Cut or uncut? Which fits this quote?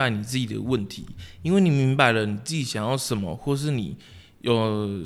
uncut